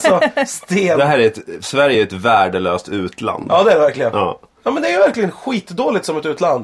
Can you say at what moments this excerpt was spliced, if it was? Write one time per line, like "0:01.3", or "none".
none